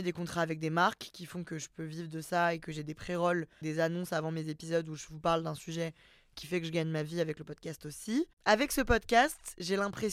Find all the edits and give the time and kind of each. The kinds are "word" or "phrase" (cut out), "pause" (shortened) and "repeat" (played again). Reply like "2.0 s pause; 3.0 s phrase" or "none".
3.6 s word

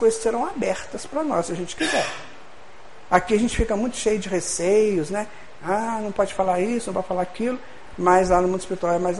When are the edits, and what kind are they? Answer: none

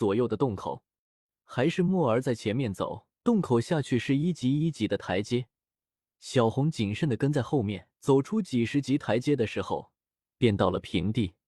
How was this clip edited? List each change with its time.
3.2 s pause; 8.0 s pause

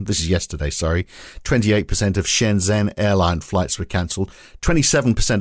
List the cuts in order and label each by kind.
none

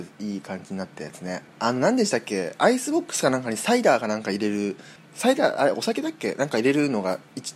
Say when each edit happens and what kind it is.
1.5 s pause; 5.0 s pause

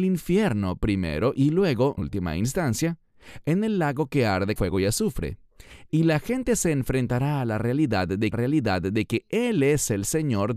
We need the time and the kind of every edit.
2.0 s word; 4.6 s word; 8.3 s repeat

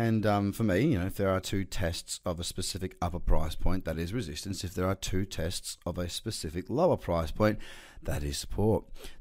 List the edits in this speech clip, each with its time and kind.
none

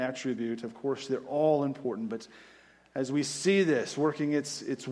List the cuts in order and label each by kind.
none

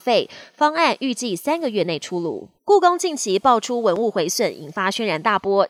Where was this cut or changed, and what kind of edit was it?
2.6 s pause

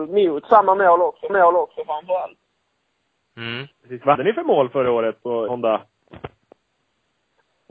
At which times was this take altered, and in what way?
1.3 s repeat; 3.7 s pause; 4.1 s word; 5.5 s word

